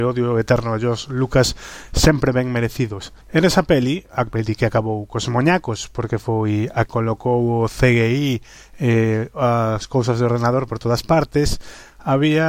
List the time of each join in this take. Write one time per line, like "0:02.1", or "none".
0:03.2
0:06.9